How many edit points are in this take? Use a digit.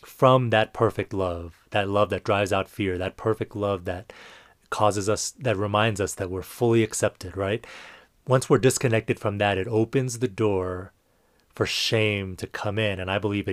0